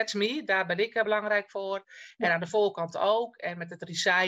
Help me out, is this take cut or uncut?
uncut